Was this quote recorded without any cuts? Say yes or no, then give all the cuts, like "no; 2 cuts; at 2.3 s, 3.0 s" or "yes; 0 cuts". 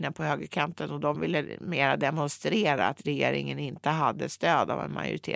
yes; 0 cuts